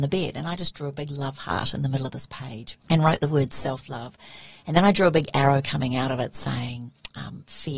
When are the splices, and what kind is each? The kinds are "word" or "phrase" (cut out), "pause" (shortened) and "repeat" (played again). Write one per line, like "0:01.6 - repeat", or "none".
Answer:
0:02.8 - pause